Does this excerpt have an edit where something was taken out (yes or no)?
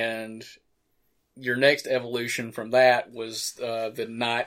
no